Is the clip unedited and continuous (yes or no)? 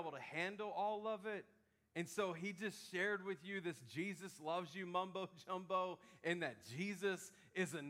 yes